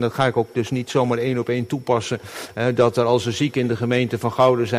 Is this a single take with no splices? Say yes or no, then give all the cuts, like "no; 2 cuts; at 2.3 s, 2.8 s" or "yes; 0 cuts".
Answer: yes; 0 cuts